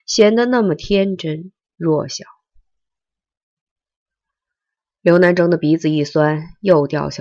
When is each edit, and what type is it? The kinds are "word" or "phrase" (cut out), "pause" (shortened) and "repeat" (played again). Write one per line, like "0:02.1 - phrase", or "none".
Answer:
none